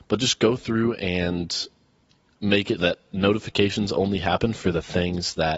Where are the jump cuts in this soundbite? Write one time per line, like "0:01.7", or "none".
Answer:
0:02.8